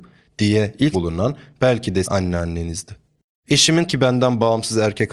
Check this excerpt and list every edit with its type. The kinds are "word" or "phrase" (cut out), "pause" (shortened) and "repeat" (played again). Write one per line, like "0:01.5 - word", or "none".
0:00.9 - word
0:02.0 - word
0:03.9 - word